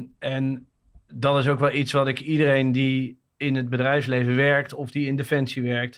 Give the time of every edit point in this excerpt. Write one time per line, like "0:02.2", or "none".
none